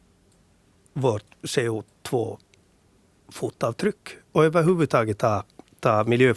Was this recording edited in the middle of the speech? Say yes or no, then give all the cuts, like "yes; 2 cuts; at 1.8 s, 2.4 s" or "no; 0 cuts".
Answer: yes; 1 cut; at 4.2 s